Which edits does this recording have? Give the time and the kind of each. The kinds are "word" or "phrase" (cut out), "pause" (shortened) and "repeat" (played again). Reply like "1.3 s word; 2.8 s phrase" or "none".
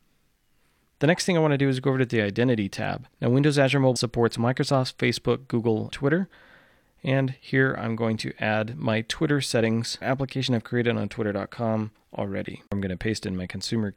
3.1 s pause; 4.0 s word; 5.9 s word; 10.0 s phrase; 12.7 s pause